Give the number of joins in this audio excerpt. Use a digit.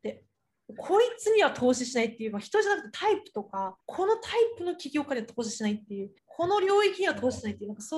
2